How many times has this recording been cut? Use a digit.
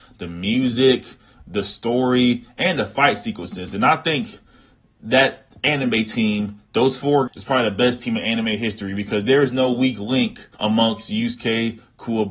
2